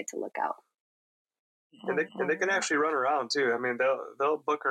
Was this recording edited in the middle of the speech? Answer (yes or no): yes